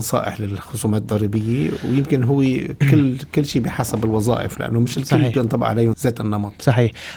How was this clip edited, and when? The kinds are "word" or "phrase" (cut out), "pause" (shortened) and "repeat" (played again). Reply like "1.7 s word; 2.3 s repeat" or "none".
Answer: 5.9 s word